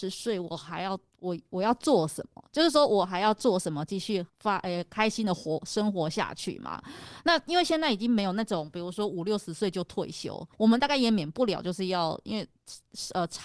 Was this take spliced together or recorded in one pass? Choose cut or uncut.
cut